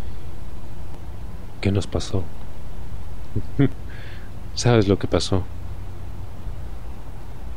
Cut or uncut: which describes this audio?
uncut